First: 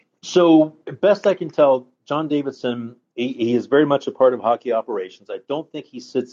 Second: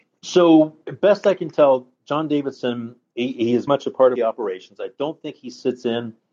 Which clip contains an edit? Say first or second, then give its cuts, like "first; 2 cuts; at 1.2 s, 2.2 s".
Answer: second; 2 cuts; at 3.7 s, 4.2 s